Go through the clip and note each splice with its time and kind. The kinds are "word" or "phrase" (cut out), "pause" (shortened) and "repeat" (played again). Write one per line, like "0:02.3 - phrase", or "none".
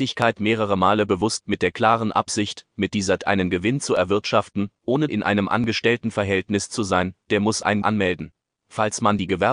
0:01.4 - word
0:03.2 - word
0:05.1 - word
0:07.8 - word